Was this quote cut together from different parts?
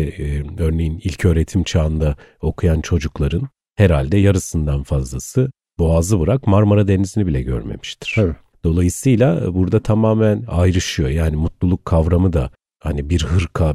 no; 0 cuts

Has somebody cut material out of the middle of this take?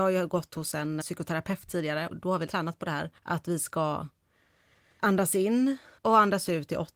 yes; 6 cuts; at 1.0 s, 2.1 s, 2.5 s, 3.2 s, 5.0 s, 6.0 s

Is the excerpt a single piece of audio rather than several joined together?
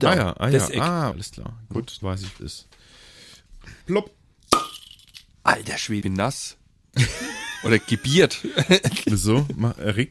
no; 5 cuts; at 1.1 s, 2.0 s, 2.4 s, 3.8 s, 6.0 s

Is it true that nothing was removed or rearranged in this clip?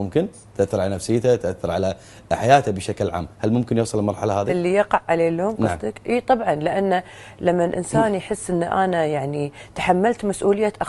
yes; 0 cuts

